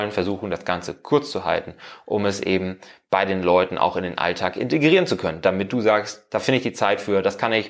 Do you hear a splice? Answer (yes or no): no